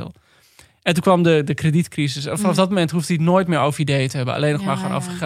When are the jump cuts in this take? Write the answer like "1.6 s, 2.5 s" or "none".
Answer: none